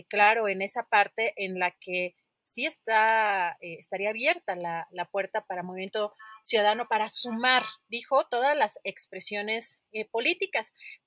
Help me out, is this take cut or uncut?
uncut